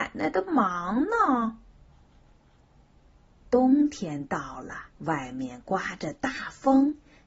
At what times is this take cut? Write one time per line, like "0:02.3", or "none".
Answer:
0:04.9